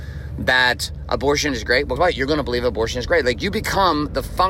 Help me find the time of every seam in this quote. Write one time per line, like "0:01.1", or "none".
0:02.0